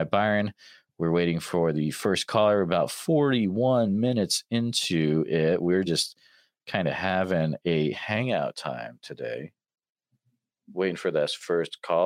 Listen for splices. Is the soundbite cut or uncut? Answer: uncut